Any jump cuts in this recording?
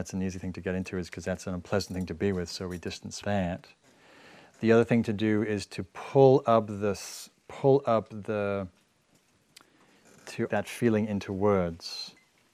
yes; 2 cuts; at 3.2 s, 10.5 s

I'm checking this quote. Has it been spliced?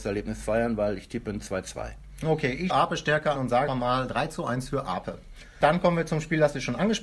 yes; 3 cuts; at 2.7 s, 3.3 s, 3.7 s

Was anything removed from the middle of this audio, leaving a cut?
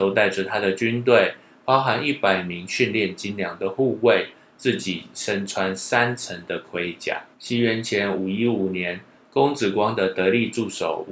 yes; 1 cut; at 7.3 s

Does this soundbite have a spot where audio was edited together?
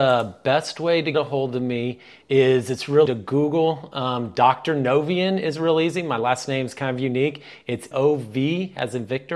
yes; 3 cuts; at 1.1 s, 3.1 s, 7.9 s

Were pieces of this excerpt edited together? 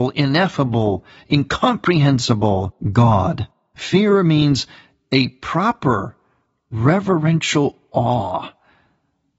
no; 0 cuts

